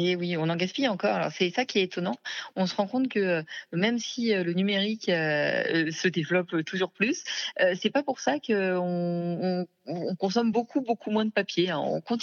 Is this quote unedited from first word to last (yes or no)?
yes